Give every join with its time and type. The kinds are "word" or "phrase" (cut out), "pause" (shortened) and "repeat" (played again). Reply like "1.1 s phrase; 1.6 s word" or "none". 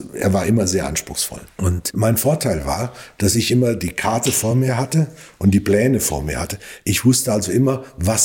none